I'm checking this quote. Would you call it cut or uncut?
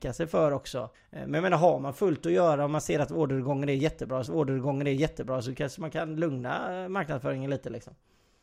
cut